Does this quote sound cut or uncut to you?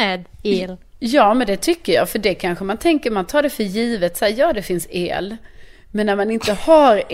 uncut